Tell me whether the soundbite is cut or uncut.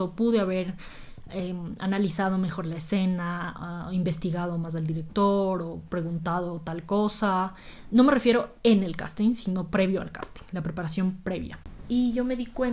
uncut